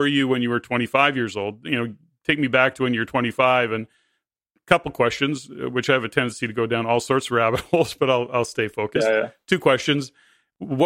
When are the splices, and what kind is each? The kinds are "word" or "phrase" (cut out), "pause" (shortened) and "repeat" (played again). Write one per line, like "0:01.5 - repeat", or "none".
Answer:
none